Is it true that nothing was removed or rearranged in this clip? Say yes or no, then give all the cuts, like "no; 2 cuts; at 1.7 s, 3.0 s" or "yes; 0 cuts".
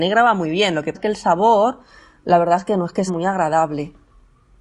no; 2 cuts; at 0.9 s, 3.1 s